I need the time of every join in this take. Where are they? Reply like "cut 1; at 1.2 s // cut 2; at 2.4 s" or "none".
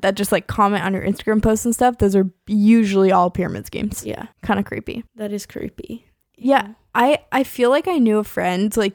cut 1; at 4.3 s // cut 2; at 5.1 s // cut 3; at 6.2 s